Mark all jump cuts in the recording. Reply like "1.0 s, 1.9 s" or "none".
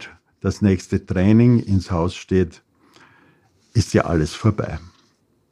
none